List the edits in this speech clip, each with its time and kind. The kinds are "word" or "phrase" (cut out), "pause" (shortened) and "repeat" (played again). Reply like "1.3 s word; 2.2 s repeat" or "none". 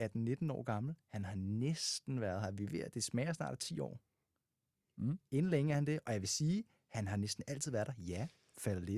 none